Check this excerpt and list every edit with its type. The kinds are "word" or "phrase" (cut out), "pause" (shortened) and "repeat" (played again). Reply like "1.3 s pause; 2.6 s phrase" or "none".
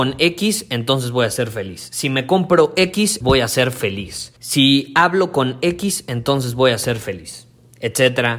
3.2 s word; 4.4 s pause